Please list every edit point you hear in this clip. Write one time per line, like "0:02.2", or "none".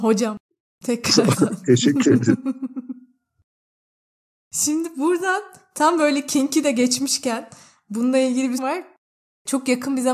0:08.6